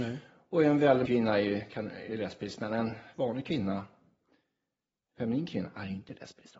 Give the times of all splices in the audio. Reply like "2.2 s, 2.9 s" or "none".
1.1 s